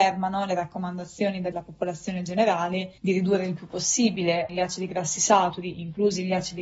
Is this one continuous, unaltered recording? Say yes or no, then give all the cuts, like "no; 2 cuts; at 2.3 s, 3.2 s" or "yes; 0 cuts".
no; 3 cuts; at 1.5 s, 3.0 s, 4.5 s